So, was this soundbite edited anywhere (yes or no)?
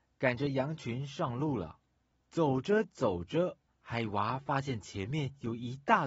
yes